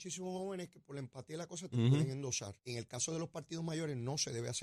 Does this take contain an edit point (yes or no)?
yes